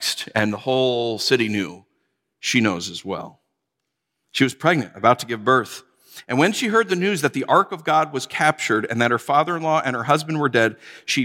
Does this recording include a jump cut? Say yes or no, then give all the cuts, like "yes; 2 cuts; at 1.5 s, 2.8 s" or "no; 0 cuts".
no; 0 cuts